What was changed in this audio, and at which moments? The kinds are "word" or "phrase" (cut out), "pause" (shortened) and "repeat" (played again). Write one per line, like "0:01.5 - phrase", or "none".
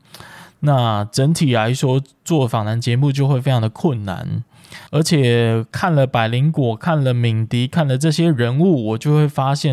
0:04.9 - pause